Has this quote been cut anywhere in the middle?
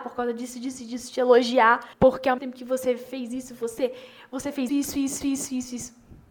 yes; 4 cuts; at 1.9 s, 2.4 s, 4.7 s, 5.2 s

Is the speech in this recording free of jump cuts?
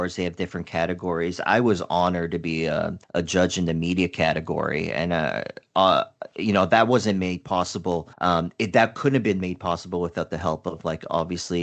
no; 2 cuts; at 3.0 s, 8.1 s

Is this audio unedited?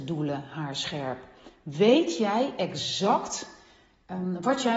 yes; 0 cuts

